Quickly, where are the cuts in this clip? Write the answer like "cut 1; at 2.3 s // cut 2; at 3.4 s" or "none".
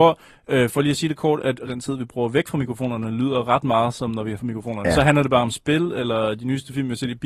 cut 1; at 1.7 s // cut 2; at 4.4 s